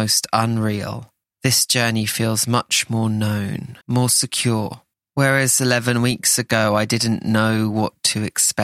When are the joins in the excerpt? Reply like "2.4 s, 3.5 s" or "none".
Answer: 1.2 s, 3.8 s, 4.9 s